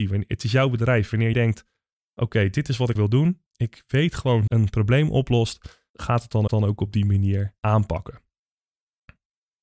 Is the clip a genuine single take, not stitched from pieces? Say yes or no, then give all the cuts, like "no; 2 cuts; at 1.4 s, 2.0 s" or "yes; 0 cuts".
no; 7 cuts; at 1.3 s, 3.0 s, 3.5 s, 4.5 s, 5.9 s, 6.5 s, 7.6 s